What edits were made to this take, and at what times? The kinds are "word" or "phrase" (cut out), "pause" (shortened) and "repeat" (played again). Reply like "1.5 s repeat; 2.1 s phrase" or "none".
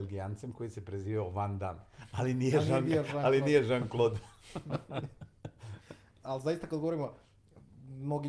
6.2 s word